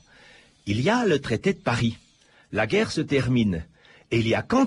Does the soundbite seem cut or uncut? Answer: uncut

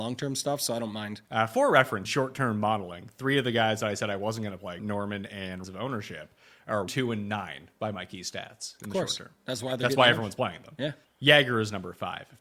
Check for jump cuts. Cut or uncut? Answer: cut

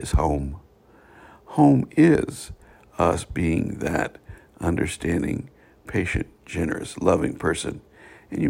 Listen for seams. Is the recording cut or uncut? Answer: uncut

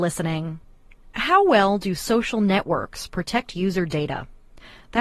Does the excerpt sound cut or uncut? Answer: uncut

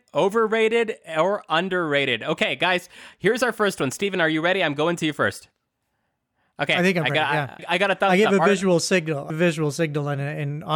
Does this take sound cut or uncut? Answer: cut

